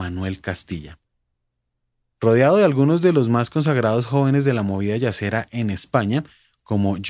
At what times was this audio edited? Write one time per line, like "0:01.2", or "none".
none